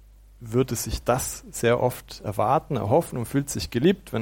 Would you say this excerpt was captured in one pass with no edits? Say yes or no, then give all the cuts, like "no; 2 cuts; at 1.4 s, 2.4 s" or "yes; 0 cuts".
yes; 0 cuts